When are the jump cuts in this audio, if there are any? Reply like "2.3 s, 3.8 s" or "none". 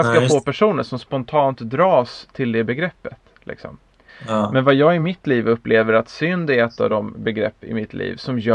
none